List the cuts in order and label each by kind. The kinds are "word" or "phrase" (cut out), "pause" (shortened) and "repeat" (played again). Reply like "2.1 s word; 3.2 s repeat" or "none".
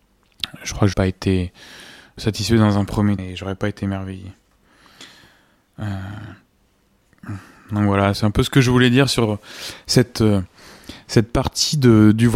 0.9 s word; 2.2 s word; 3.2 s word; 8.1 s phrase